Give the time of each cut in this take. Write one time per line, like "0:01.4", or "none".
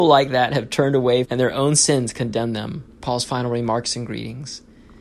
0:01.2
0:02.9